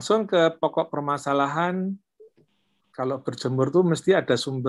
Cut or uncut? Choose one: uncut